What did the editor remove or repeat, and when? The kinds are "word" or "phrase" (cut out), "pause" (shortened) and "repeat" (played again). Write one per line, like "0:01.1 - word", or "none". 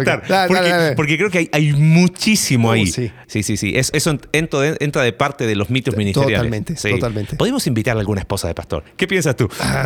0:03.2 - word
0:03.9 - word

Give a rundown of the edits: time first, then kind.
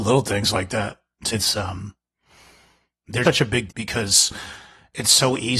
0:01.3 - word
0:03.2 - word
0:03.7 - word

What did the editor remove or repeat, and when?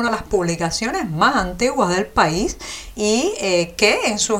none

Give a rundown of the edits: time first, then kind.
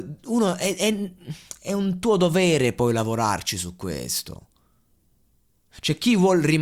none

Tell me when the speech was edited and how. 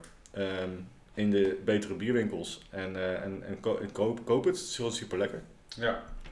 none

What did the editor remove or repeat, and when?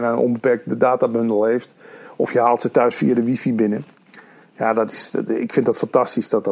none

